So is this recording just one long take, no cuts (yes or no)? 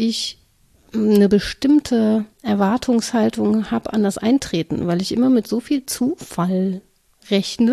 no